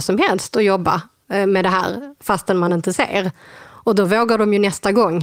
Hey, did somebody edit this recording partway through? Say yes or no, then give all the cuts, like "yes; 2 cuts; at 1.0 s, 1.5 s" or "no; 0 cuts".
no; 0 cuts